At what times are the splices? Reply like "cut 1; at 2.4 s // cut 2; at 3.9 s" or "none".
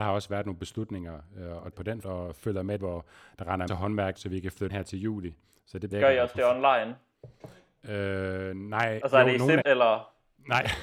cut 1; at 1.7 s // cut 2; at 2.0 s // cut 3; at 2.8 s // cut 4; at 3.7 s // cut 5; at 4.2 s // cut 6; at 4.7 s // cut 7; at 5.9 s // cut 8; at 9.6 s